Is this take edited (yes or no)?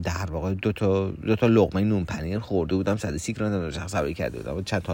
no